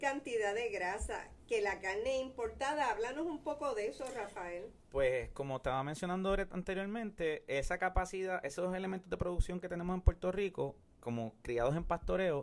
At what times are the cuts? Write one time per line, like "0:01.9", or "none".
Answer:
none